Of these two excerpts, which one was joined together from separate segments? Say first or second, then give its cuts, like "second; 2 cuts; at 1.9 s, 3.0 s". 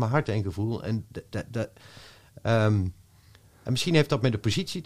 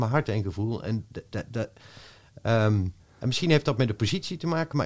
second; 1 cut; at 3.0 s